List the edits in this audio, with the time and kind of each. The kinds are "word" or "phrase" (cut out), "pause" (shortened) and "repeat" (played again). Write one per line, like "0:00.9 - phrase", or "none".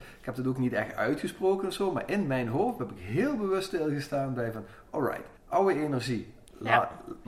0:05.4 - pause